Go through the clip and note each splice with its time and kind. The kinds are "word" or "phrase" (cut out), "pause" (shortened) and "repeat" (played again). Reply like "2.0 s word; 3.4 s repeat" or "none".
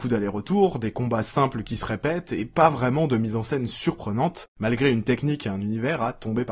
4.5 s pause